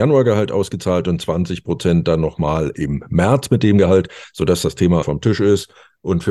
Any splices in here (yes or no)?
yes